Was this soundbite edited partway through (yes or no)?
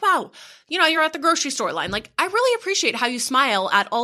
no